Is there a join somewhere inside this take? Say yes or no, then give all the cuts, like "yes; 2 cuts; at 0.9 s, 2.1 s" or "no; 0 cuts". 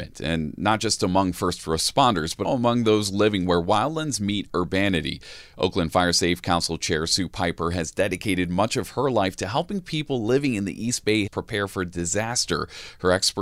yes; 2 cuts; at 2.4 s, 11.3 s